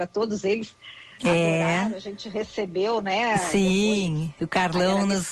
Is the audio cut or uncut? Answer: uncut